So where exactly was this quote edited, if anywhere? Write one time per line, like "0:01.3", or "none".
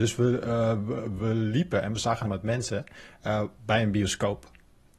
0:01.2
0:02.2